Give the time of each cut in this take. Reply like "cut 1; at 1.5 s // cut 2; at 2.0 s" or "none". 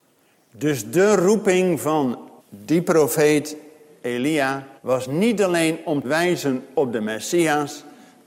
cut 1; at 2.4 s // cut 2; at 4.8 s // cut 3; at 6.0 s